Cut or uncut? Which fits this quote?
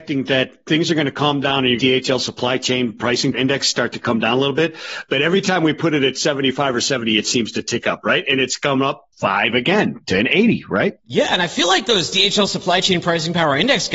cut